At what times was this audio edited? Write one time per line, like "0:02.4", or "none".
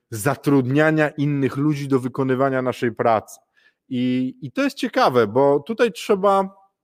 none